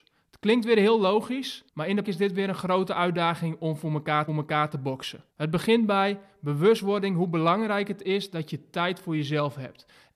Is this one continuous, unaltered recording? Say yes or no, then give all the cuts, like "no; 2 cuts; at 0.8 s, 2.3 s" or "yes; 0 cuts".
no; 4 cuts; at 1.7 s, 2.0 s, 4.3 s, 5.3 s